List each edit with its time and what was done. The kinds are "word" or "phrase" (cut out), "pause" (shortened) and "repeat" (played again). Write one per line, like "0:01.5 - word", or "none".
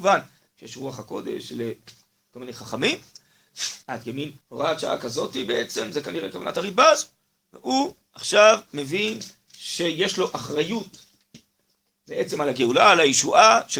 0:03.8 - pause
0:04.4 - pause